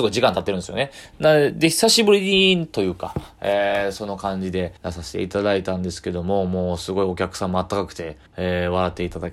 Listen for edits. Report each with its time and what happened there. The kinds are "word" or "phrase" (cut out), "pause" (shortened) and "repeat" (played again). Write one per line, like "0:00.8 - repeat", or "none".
0:04.8 - pause
0:08.3 - pause